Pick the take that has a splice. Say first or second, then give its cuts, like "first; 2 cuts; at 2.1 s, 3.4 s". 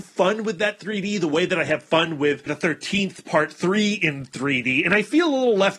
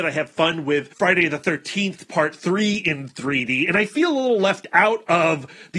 first; 1 cut; at 2.5 s